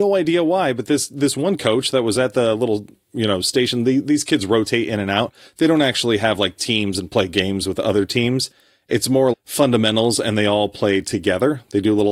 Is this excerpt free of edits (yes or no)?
no